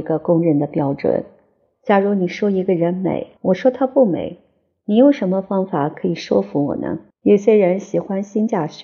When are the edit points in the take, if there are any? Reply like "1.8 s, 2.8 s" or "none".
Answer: 3.4 s, 7.1 s